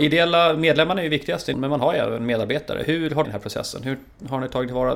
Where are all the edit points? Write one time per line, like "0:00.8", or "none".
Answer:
0:01.5
0:03.2